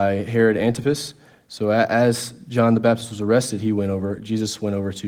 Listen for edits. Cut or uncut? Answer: uncut